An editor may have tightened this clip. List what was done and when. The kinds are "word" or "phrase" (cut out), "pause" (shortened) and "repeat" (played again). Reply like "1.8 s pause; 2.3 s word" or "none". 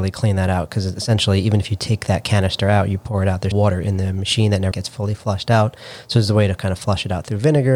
3.5 s word; 4.7 s word